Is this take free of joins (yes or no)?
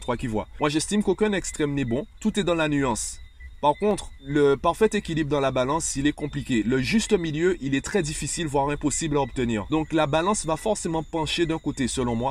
yes